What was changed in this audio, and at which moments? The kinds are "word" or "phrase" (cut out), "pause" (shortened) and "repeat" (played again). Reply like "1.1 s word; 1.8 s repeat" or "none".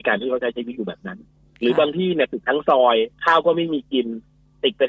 3.1 s pause